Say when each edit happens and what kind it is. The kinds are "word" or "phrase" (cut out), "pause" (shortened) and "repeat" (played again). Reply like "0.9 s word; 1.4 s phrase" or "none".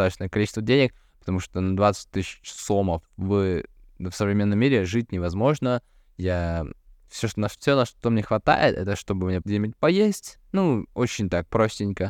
9.4 s word